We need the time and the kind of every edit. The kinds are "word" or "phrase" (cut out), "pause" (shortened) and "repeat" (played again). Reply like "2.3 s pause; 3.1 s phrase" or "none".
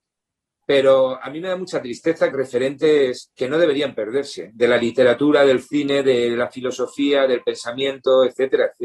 2.3 s phrase; 3.3 s pause